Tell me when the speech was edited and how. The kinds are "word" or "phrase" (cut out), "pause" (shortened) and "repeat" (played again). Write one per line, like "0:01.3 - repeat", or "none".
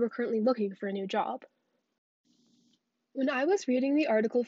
none